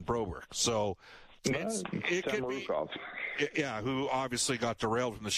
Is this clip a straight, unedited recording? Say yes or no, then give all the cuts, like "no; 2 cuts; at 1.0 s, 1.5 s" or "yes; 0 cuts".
no; 1 cut; at 1.3 s